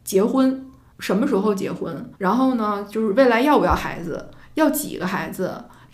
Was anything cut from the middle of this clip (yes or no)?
yes